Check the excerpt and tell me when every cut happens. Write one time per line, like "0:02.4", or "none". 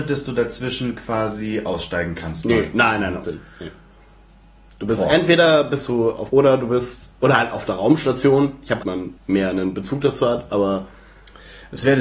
0:03.2
0:06.3
0:08.8
0:09.2

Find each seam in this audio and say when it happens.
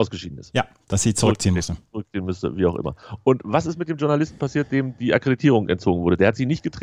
none

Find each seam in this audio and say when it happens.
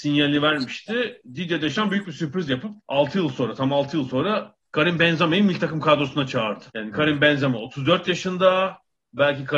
0:02.8
0:06.7

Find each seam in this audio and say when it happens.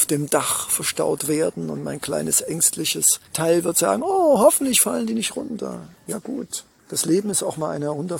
0:03.2
0:06.8

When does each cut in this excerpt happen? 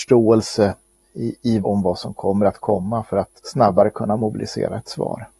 0:01.6
0:03.4

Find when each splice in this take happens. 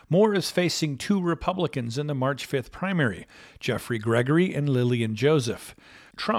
none

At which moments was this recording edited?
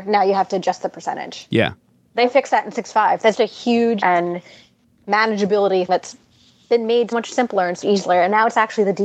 0:03.3
0:04.0
0:05.9
0:07.1
0:07.8

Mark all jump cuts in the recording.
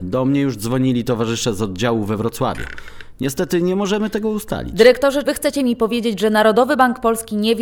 0:05.2

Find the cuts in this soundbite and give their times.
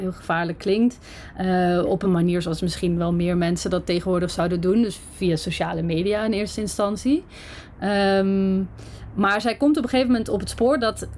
none

